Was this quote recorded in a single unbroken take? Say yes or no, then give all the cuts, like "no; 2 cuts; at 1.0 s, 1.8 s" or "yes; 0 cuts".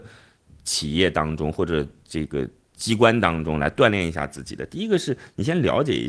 yes; 0 cuts